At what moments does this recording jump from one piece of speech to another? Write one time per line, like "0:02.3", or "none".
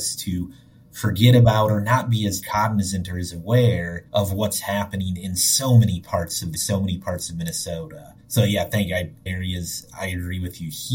0:04.1
0:06.5
0:08.2
0:09.3